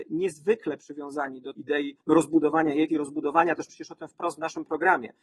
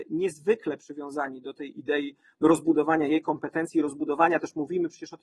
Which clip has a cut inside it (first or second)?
first